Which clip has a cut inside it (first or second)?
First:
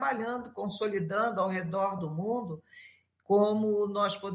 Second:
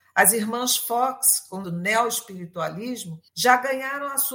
second